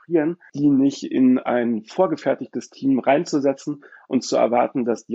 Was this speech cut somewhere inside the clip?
no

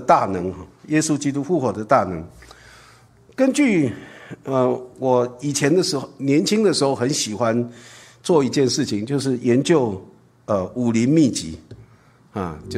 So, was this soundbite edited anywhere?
no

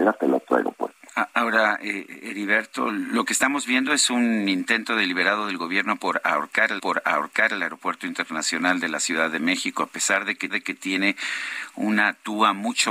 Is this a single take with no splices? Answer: no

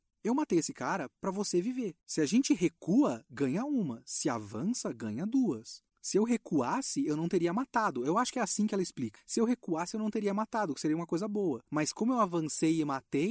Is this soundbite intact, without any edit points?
no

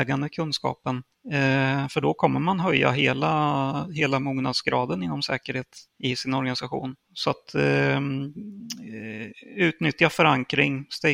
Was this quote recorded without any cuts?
no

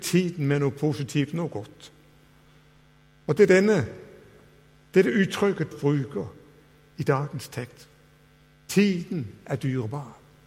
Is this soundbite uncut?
no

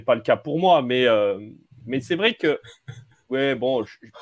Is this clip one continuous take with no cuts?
yes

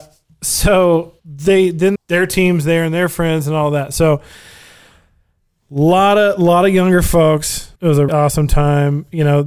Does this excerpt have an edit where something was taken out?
yes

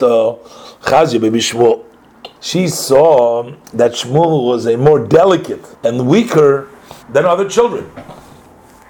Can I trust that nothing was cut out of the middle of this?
no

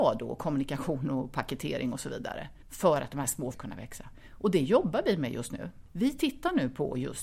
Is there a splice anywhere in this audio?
yes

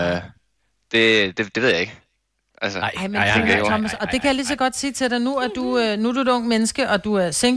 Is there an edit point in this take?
no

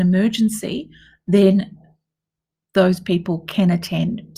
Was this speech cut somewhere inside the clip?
no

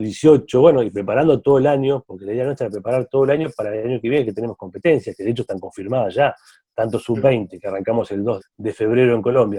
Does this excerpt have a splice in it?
yes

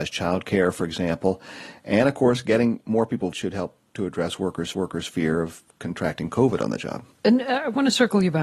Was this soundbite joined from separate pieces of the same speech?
yes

